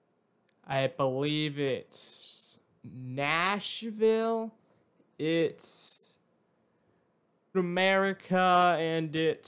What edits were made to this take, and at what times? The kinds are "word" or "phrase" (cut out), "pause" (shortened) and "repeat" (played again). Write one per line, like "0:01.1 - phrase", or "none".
0:02.7 - pause
0:07.5 - word